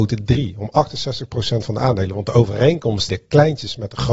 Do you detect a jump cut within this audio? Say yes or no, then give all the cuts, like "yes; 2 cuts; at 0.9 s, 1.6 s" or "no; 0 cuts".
yes; 1 cut; at 3.1 s